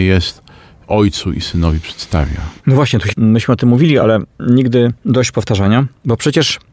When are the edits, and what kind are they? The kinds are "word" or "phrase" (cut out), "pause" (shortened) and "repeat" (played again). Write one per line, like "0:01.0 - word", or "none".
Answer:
0:03.1 - phrase

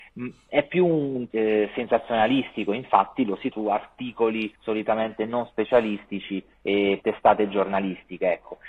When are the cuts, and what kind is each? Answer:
0:01.3 - word
0:03.5 - word
0:04.6 - pause
0:07.0 - word

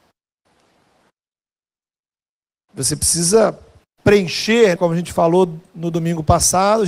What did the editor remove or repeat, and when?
0:04.8 - word

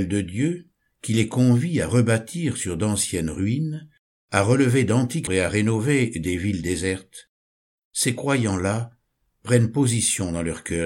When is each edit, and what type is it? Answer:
0:05.3 - word

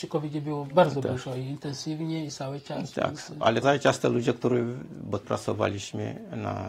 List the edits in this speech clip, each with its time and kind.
0:03.6 - word
0:05.2 - word

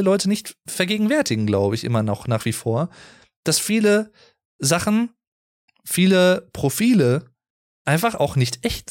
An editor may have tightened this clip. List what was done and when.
none

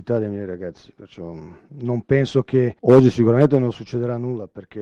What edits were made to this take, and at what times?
0:02.8 - pause

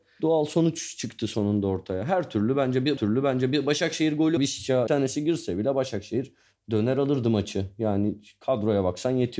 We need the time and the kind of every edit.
0:03.0 - repeat
0:04.4 - phrase
0:04.9 - phrase

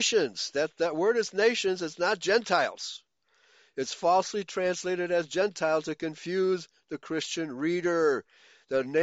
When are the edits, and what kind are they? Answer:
none

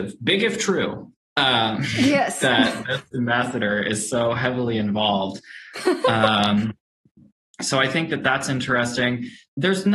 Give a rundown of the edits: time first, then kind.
none

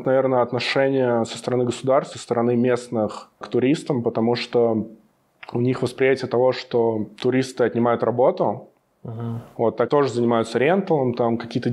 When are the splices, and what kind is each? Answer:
0:02.1 - word
0:03.4 - word
0:09.9 - word

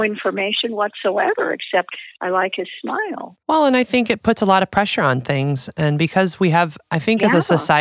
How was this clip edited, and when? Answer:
0:03.4 - pause

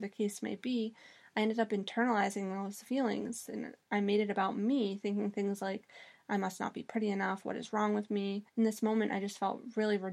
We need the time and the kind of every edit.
0:03.8 - pause
0:08.5 - pause

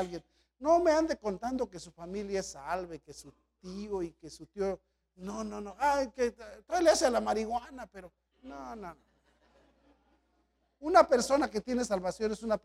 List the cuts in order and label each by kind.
none

